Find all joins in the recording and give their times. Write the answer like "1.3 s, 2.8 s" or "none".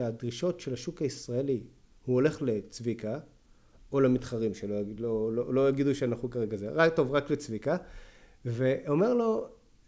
none